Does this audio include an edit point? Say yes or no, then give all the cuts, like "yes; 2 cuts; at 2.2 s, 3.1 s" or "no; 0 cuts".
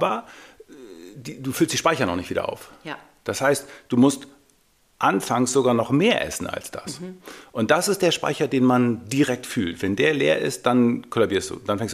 no; 0 cuts